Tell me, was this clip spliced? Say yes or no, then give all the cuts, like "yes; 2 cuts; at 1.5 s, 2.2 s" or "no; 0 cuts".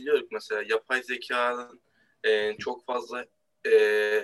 no; 0 cuts